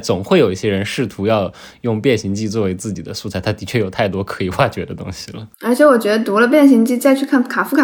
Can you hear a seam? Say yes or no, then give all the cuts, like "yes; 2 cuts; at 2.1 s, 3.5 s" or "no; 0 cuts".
yes; 1 cut; at 5.5 s